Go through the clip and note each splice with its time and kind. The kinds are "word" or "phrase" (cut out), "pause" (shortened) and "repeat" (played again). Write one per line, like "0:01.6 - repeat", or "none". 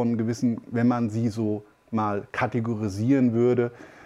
none

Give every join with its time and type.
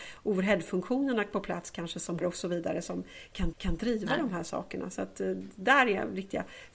0:02.2 - word
0:03.5 - repeat

